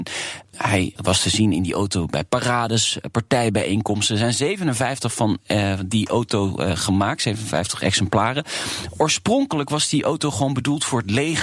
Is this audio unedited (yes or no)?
yes